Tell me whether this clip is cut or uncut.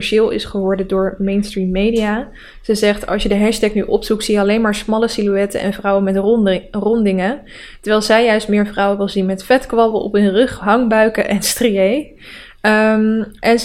uncut